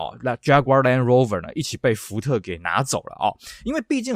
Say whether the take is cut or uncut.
uncut